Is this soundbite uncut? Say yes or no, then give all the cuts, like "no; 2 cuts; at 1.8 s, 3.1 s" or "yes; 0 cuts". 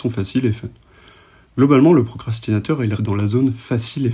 no; 1 cut; at 3.0 s